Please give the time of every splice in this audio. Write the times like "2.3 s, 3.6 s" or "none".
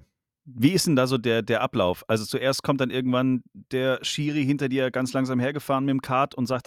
none

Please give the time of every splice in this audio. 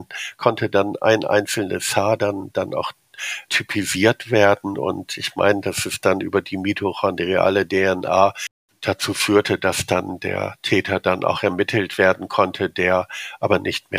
3.5 s

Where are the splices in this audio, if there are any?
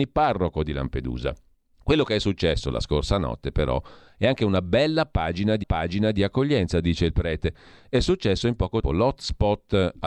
1.5 s, 5.6 s, 8.8 s

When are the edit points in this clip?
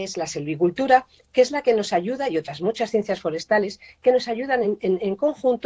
none

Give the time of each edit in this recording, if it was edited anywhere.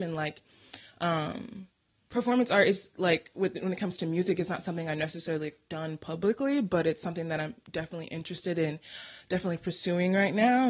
none

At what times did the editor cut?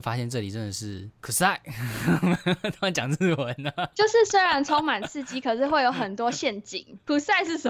1.1 s

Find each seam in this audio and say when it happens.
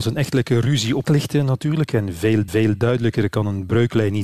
1.0 s, 2.5 s

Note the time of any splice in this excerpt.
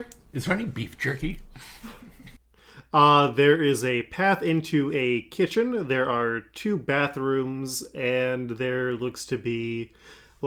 none

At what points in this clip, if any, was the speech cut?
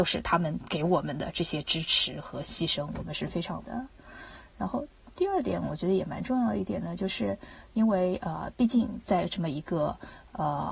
3.6 s

